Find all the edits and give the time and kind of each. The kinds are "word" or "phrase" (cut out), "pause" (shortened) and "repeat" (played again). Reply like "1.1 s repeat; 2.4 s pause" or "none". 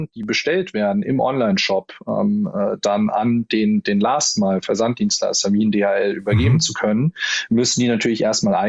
none